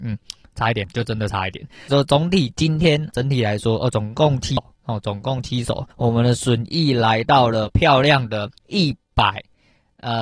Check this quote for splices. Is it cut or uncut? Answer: cut